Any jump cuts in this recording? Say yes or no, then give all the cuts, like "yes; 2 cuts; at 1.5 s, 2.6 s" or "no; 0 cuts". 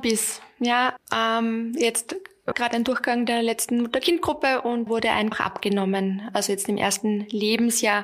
yes; 4 cuts; at 1.0 s, 2.5 s, 4.9 s, 5.3 s